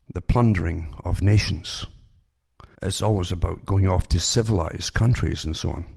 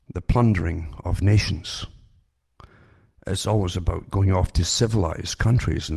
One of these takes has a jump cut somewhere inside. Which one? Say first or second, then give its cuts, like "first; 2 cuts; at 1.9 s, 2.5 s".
first; 1 cut; at 2.7 s